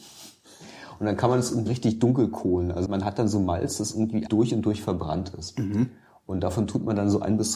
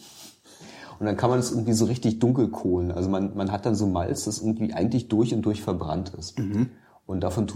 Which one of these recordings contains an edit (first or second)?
first